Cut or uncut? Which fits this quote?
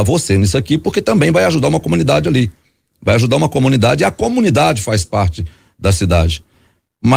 uncut